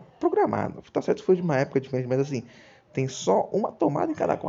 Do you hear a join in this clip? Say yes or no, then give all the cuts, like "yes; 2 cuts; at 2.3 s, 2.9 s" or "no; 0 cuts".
no; 0 cuts